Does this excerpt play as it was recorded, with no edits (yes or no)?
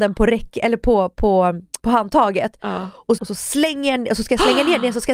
no